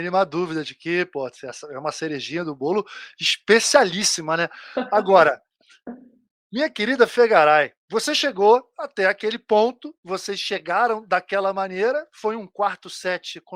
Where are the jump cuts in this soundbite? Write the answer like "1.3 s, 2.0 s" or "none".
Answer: 7.8 s